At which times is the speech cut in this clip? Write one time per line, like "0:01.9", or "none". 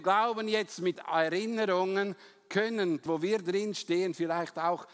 0:00.9
0:03.1